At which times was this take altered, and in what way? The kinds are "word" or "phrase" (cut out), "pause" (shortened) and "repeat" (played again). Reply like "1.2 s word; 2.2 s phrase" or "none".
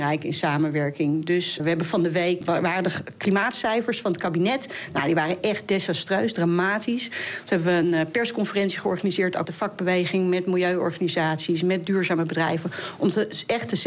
1.6 s word; 2.4 s word; 9.4 s phrase